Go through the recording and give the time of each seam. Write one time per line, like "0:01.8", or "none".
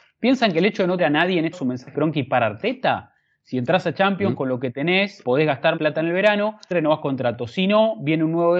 0:01.0
0:01.5
0:01.9
0:05.2
0:05.8
0:06.7